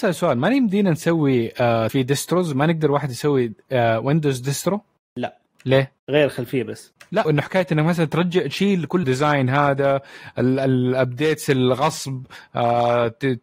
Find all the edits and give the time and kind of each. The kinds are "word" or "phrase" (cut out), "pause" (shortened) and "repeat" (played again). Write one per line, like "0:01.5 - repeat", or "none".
0:01.9 - phrase
0:06.0 - pause
0:07.2 - word
0:09.0 - word